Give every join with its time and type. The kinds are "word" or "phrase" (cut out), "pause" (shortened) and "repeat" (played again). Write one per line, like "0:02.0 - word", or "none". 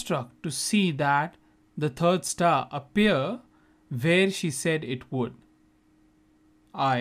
none